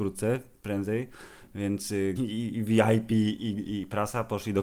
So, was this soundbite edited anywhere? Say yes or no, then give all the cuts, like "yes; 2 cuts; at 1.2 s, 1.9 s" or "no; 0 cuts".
yes; 1 cut; at 2.2 s